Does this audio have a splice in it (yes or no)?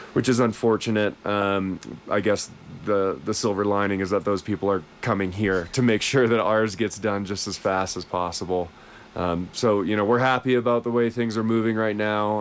no